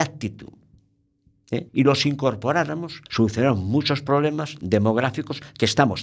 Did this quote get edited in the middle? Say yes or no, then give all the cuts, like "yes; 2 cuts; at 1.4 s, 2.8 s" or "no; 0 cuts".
yes; 2 cuts; at 1.7 s, 3.1 s